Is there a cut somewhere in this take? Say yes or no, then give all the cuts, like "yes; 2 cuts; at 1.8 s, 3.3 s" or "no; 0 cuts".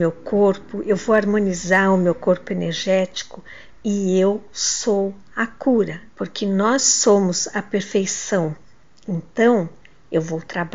yes; 2 cuts; at 6.1 s, 6.8 s